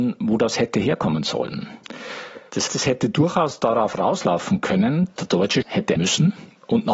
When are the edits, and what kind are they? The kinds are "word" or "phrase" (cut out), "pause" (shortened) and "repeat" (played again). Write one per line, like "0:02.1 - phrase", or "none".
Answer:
0:02.7 - word
0:05.2 - word
0:05.6 - word
0:06.0 - word